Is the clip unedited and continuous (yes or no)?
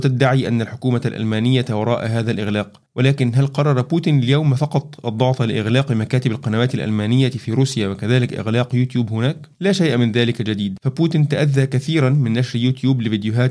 yes